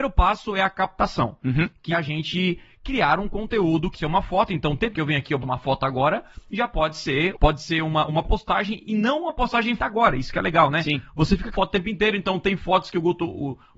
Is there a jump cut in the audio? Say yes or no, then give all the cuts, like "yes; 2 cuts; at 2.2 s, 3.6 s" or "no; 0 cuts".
yes; 8 cuts; at 1.9 s, 3.9 s, 4.9 s, 5.4 s, 7.3 s, 8.1 s, 9.8 s, 11.5 s